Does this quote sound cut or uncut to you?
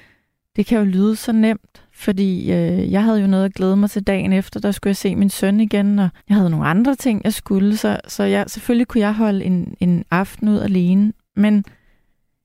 cut